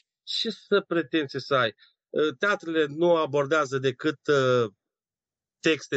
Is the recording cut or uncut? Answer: uncut